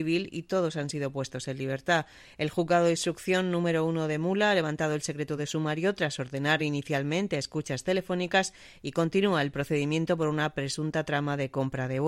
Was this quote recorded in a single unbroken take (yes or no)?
yes